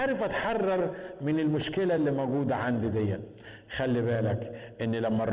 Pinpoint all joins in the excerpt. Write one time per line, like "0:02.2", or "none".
none